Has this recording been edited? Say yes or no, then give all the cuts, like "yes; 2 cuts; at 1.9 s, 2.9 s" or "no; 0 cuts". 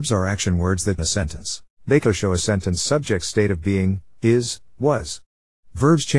yes; 3 cuts; at 1.0 s, 1.7 s, 2.0 s